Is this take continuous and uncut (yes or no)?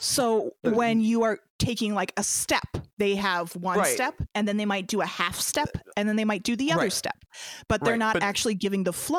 no